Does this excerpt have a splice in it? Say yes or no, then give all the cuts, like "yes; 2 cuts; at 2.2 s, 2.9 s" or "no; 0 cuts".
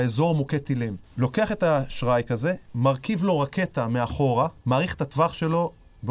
yes; 1 cut; at 4.6 s